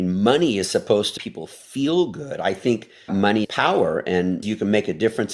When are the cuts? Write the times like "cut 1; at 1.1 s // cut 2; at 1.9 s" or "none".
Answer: cut 1; at 1.2 s // cut 2; at 3.1 s // cut 3; at 3.4 s // cut 4; at 4.4 s